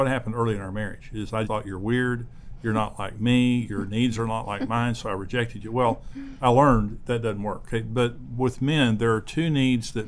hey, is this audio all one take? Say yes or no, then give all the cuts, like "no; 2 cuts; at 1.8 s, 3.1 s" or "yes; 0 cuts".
no; 1 cut; at 1.4 s